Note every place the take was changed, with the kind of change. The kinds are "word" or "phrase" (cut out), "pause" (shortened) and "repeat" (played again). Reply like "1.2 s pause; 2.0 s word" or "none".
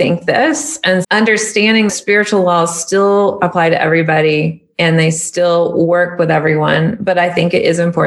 1.0 s word; 1.9 s word

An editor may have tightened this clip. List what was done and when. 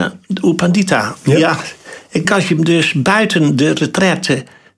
2.2 s word

